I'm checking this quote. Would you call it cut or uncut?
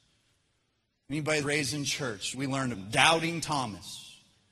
cut